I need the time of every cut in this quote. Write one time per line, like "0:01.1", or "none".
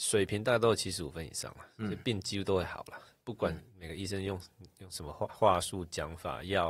0:05.3